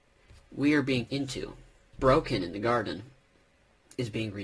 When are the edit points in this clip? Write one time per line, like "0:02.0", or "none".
0:01.1
0:01.9